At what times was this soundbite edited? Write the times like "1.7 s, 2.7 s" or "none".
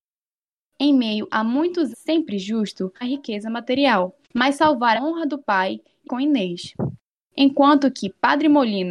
1.9 s, 3.0 s, 4.2 s, 5.0 s, 6.0 s